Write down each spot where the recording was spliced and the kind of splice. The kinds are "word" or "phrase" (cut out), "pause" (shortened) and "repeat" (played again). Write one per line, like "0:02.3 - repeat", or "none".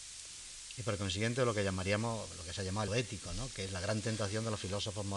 0:02.9 - word